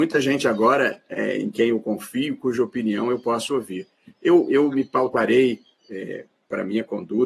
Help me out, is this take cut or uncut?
uncut